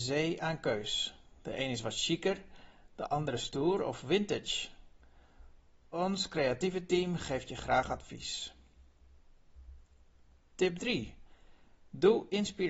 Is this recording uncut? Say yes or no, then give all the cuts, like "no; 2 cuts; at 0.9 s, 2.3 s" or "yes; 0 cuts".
yes; 0 cuts